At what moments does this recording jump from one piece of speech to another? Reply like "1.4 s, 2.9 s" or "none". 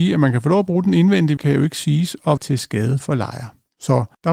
1.4 s, 2.4 s